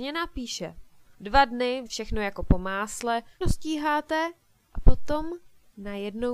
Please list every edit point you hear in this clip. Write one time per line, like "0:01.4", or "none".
0:01.1
0:01.9
0:03.4
0:04.6

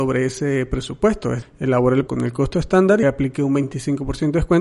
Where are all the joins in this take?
0:01.4
0:02.1
0:03.0

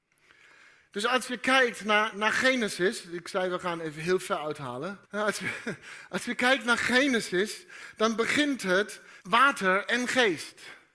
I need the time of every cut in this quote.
0:02.1
0:05.1
0:09.2

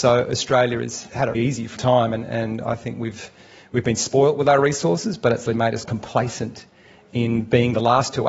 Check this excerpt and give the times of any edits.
0:01.3
0:01.8
0:05.4
0:05.8

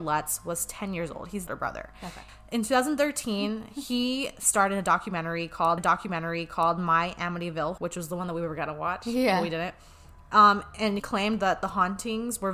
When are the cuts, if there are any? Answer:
0:01.5
0:05.8
0:07.8
0:11.0

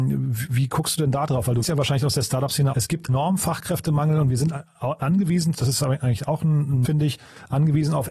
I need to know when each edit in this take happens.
0:01.6
0:02.7
0:03.1
0:05.5
0:06.8

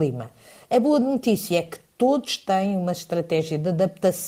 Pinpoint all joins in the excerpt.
none

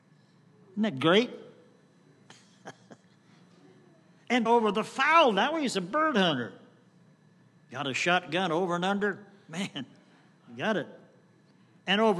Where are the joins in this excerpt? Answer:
0:04.5

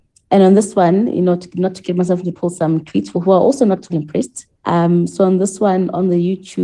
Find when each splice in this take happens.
0:02.3
0:03.1
0:03.9
0:04.5

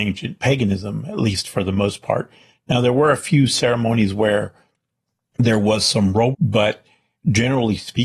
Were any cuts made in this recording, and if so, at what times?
0:06.3

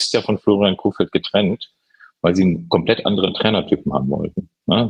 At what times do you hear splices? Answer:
none

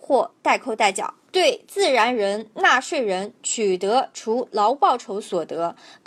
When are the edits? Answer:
0:01.3

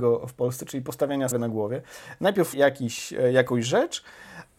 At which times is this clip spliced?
0:01.3
0:02.5

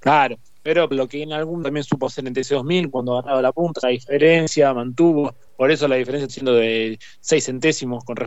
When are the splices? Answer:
0:00.9
0:01.6
0:03.8
0:05.5
0:06.3

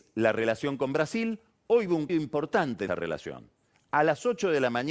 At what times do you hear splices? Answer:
0:02.1
0:02.9

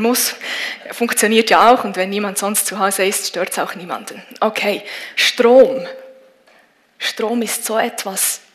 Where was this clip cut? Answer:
none

